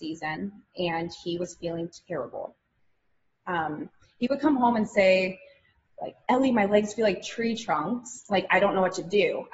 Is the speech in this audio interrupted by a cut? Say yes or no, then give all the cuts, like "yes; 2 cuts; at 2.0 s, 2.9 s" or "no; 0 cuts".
no; 0 cuts